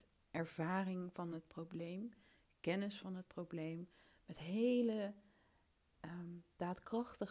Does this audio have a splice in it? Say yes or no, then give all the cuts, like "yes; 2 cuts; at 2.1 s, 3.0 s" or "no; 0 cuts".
no; 0 cuts